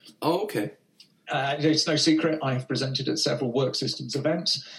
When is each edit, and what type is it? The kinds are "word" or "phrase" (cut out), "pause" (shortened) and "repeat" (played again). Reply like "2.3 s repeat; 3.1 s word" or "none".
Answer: none